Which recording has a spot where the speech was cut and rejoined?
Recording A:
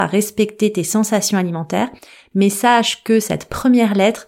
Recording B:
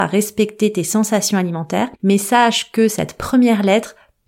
B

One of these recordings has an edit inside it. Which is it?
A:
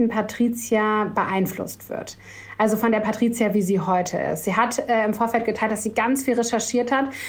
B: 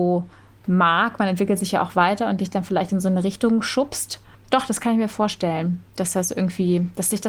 B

